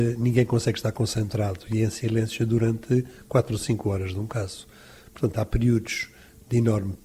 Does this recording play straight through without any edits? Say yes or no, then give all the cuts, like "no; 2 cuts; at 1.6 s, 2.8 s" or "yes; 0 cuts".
yes; 0 cuts